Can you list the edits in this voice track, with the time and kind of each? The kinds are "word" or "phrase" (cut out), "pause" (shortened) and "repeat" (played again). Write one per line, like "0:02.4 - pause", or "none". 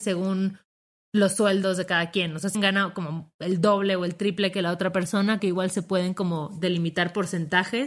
0:02.5 - word
0:05.4 - word

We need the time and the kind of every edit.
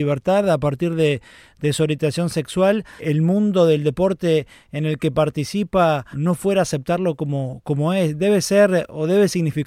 0:03.0 - phrase
0:06.1 - word

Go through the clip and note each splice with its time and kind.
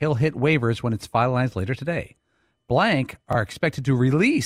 none

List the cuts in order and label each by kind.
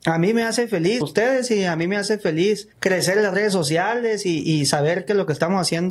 0:01.0 - phrase
0:02.7 - pause

